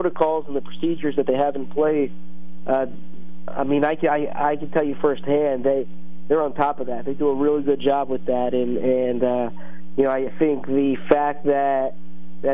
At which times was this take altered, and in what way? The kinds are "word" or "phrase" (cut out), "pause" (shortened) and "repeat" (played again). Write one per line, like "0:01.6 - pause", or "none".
0:10.3 - word